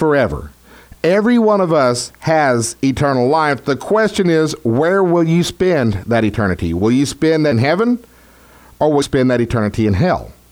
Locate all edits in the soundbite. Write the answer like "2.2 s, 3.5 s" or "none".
7.5 s, 9.0 s